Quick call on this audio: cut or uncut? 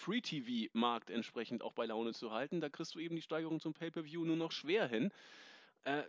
uncut